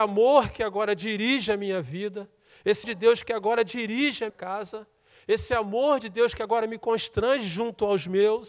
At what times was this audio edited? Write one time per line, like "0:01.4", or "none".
0:02.8
0:04.3